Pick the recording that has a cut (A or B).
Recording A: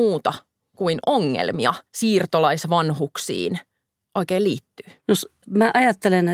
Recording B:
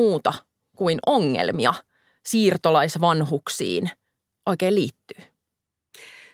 A